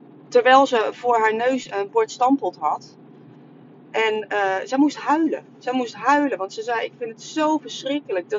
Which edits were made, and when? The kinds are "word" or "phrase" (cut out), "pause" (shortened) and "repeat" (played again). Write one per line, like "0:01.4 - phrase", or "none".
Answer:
0:01.7 - word